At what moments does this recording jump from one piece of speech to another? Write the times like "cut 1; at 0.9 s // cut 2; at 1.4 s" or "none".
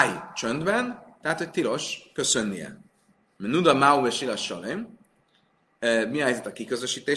none